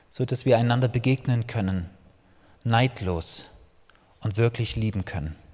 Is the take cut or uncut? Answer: uncut